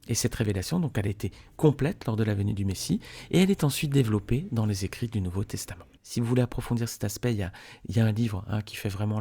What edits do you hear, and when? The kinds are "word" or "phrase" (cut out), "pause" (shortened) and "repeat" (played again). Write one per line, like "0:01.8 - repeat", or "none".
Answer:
0:06.0 - pause